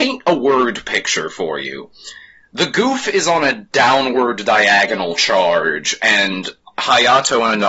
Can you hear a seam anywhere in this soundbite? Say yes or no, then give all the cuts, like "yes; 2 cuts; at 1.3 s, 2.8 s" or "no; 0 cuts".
no; 0 cuts